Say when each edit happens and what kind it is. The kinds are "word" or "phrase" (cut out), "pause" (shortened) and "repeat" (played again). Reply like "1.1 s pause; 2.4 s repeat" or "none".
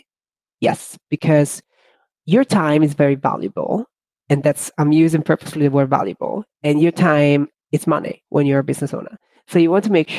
none